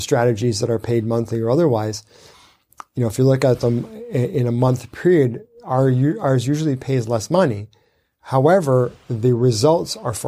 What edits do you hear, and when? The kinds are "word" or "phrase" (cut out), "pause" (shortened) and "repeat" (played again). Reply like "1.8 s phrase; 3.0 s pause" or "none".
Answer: none